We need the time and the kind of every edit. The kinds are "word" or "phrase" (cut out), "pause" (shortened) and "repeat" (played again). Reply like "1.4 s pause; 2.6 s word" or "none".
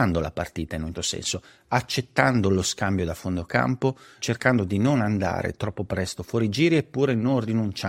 0.9 s word